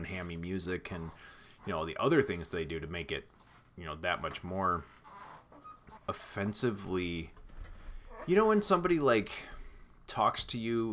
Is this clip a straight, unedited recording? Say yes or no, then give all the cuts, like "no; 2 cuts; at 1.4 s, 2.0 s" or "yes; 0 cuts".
no; 1 cut; at 6.0 s